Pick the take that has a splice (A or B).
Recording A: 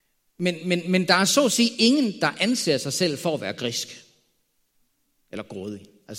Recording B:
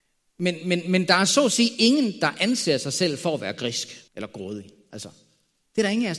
B